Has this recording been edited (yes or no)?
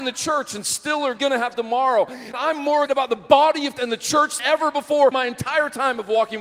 yes